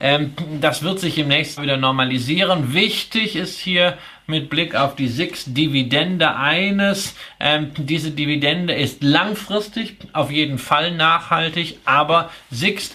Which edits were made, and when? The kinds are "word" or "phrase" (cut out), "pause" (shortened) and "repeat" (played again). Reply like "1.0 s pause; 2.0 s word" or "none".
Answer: 1.6 s word

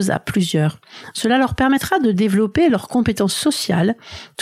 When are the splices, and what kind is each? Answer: none

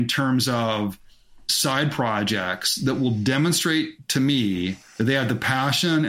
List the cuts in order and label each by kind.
none

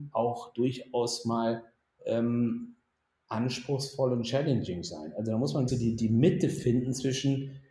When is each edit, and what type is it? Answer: 2.0 s word; 5.7 s word

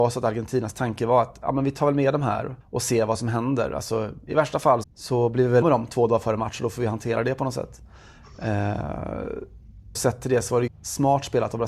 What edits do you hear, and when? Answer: 2.6 s pause; 4.8 s word; 5.6 s word; 10.0 s word; 10.7 s word

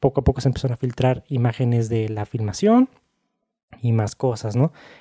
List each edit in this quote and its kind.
none

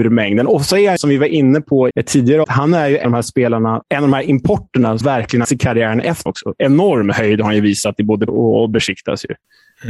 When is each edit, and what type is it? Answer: 1.0 s word; 1.9 s word; 2.4 s word; 3.0 s word; 3.8 s word; 5.0 s word; 5.4 s word; 6.3 s word; 8.3 s word

